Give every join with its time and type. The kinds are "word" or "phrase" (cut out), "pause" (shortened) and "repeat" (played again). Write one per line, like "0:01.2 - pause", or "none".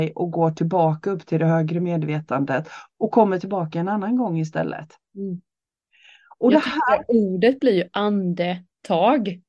none